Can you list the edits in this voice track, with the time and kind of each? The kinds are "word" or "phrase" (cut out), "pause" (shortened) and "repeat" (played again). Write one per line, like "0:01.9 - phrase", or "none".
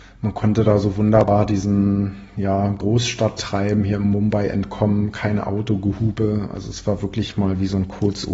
none